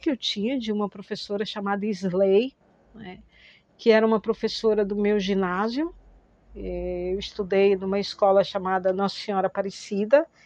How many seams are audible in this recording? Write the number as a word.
zero